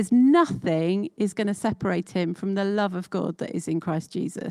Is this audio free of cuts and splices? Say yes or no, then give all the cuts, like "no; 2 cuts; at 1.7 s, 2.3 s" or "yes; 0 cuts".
yes; 0 cuts